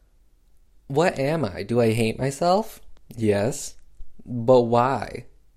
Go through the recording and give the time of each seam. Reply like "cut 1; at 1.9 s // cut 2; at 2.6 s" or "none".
none